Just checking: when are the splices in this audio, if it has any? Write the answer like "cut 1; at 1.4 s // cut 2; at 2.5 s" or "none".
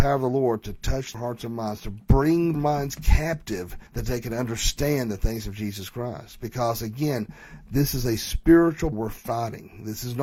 cut 1; at 1.1 s // cut 2; at 2.5 s // cut 3; at 3.9 s // cut 4; at 8.9 s

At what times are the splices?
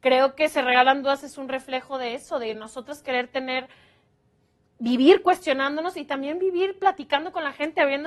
none

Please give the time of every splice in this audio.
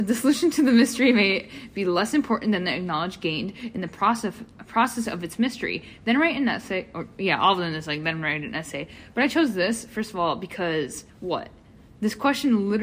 cut 1; at 11.1 s

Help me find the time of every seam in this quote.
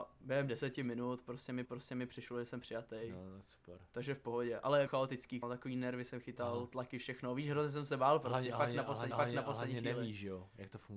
cut 1; at 1.6 s // cut 2; at 4.9 s // cut 3; at 5.4 s // cut 4; at 9.1 s

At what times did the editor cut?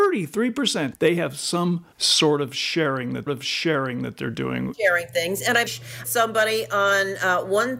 cut 1; at 0.9 s // cut 2; at 1.9 s // cut 3; at 3.3 s // cut 4; at 4.7 s // cut 5; at 5.7 s // cut 6; at 6.0 s

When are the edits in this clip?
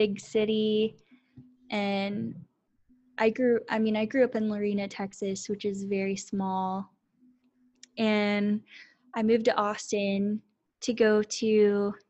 none

